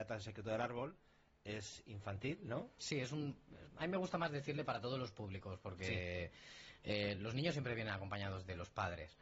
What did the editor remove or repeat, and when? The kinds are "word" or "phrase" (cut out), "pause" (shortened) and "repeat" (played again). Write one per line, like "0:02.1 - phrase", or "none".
none